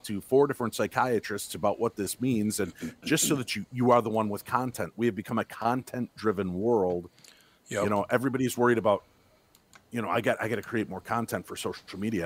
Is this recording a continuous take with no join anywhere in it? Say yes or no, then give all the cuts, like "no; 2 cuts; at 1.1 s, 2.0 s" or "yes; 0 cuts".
yes; 0 cuts